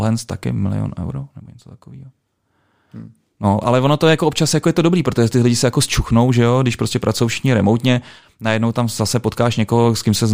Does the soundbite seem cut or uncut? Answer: uncut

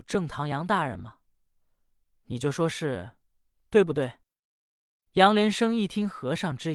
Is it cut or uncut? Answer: uncut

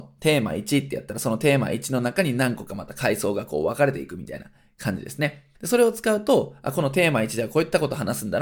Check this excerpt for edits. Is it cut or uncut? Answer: cut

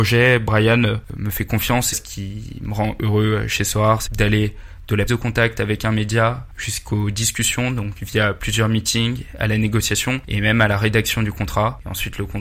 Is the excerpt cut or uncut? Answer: cut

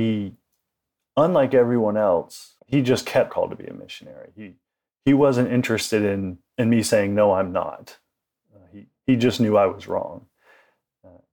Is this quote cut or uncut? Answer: cut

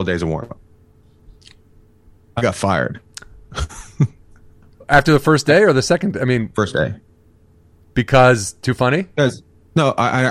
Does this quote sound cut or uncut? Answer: uncut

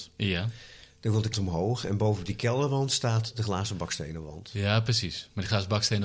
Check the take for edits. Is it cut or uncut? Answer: cut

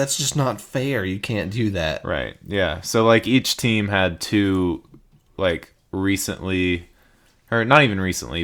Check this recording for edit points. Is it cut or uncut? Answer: uncut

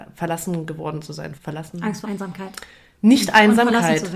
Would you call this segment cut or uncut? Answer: cut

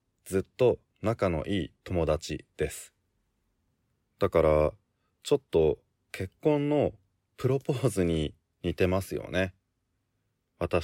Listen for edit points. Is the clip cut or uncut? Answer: uncut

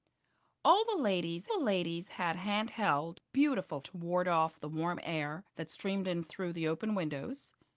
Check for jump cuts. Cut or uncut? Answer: cut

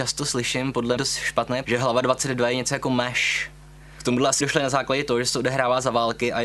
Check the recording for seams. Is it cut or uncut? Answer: cut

